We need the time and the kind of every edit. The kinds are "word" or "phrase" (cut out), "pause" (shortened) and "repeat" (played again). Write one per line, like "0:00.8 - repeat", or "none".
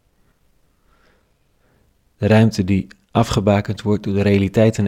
none

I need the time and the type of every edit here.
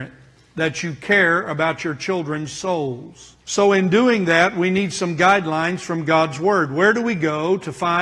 0:03.4 - pause

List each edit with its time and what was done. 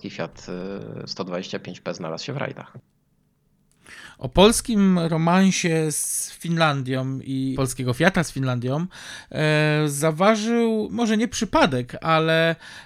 0:07.5 - word

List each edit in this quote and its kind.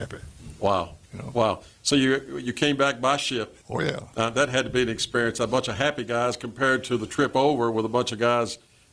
0:01.0 - pause
0:03.6 - pause
0:04.1 - pause

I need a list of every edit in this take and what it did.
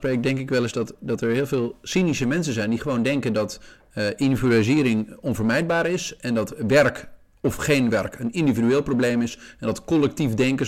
none

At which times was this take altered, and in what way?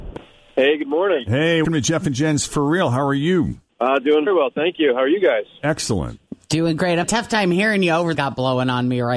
0:01.6 - word
0:02.5 - word
0:04.3 - word
0:07.0 - phrase
0:08.1 - phrase

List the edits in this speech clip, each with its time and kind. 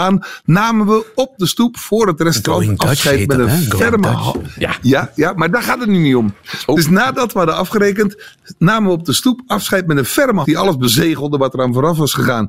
0:10.4 - word

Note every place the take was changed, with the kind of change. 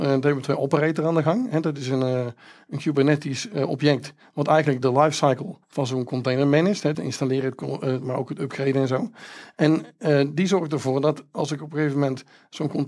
0:04.8 - word
0:05.6 - pause
0:06.9 - phrase

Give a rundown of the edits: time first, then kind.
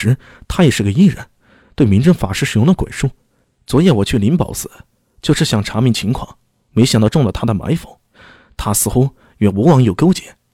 none

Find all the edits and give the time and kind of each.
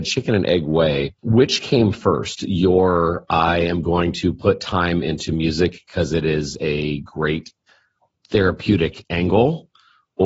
0:01.2 - pause

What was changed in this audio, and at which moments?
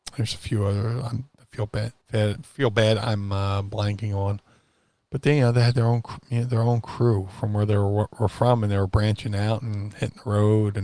0:02.0 - pause

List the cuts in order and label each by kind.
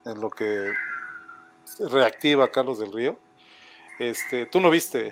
none

